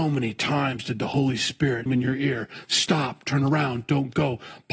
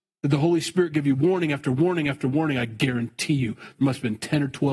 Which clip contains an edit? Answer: first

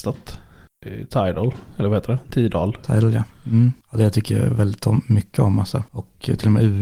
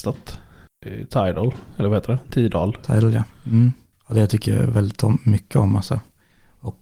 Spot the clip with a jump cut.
first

